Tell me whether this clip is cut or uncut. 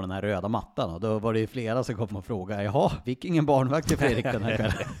cut